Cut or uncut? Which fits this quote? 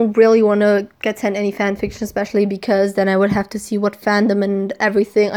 uncut